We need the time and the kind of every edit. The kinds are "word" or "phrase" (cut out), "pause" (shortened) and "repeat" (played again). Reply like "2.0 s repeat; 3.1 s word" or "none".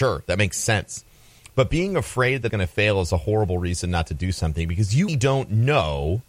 2.5 s word; 5.1 s word

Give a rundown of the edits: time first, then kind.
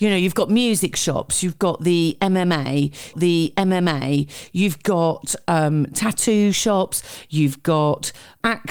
3.1 s repeat

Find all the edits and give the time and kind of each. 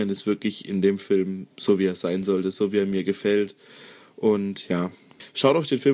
none

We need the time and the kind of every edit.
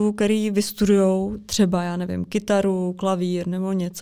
none

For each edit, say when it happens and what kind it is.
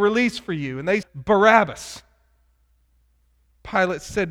1.0 s word

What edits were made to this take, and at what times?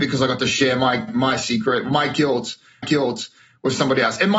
1.1 s word; 2.8 s repeat

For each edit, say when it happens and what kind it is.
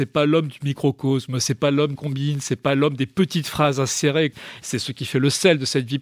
1.9 s word

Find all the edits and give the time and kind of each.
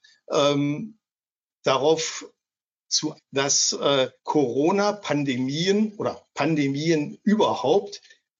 3.2 s word; 4.2 s pause

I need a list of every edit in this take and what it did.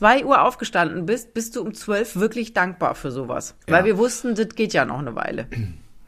3.6 s pause

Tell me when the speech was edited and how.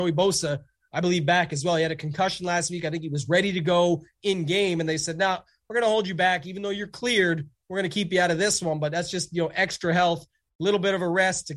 none

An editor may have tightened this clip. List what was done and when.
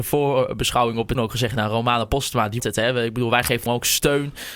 1.1 s word; 2.6 s word; 3.7 s word

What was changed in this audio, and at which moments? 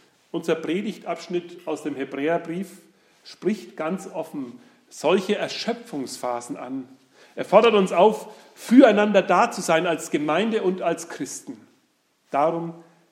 none

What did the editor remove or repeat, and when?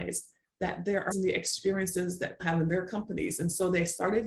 1.1 s word; 2.4 s word

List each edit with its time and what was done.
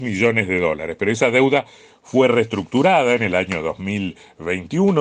none

